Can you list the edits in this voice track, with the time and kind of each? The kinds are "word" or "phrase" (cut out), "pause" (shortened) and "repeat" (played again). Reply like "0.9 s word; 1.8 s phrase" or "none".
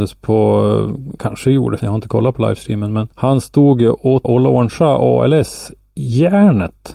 1.2 s word; 1.8 s word; 3.1 s pause; 4.2 s word